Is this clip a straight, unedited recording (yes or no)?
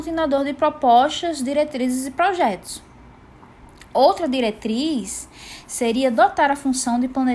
yes